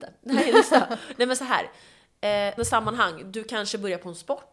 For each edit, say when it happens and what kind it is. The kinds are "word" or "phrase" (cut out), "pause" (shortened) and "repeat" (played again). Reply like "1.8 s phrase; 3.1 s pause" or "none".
2.6 s word